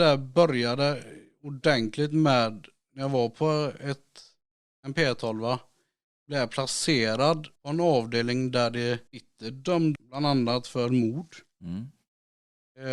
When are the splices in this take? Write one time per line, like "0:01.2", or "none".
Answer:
0:07.6
0:09.1
0:09.9